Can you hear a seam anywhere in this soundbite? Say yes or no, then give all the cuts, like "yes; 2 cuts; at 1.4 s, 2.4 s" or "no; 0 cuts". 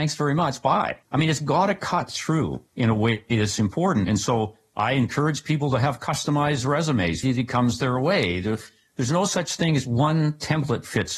yes; 3 cuts; at 1.0 s, 2.7 s, 7.2 s